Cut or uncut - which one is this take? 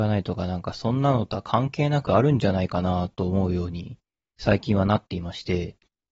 uncut